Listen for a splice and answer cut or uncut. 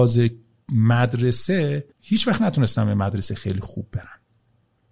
cut